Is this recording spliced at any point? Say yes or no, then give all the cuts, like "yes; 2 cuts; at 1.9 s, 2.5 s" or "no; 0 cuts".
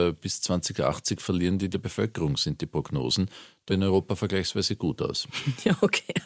yes; 2 cuts; at 1.7 s, 3.7 s